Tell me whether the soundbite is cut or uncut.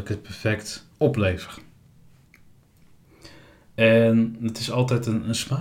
cut